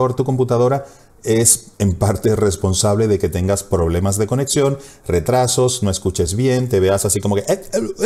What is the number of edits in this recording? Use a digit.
0